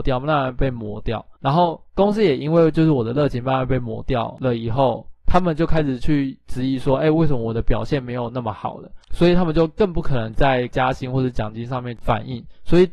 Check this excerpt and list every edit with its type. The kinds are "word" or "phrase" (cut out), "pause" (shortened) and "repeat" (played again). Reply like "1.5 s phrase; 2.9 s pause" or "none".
1.4 s pause; 5.2 s pause; 9.0 s pause